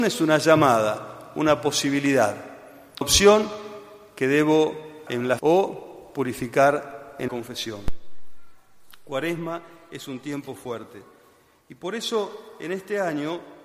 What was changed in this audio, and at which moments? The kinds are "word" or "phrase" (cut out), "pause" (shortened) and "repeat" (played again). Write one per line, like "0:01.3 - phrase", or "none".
0:03.0 - word
0:05.1 - word
0:05.4 - word
0:07.3 - word